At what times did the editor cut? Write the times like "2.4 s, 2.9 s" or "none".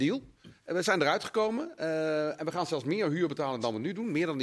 none